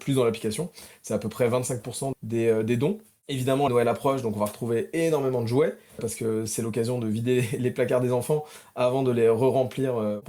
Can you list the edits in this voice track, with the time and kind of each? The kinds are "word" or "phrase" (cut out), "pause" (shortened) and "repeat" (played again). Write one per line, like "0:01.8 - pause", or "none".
0:02.1 - word
0:03.7 - word
0:06.0 - word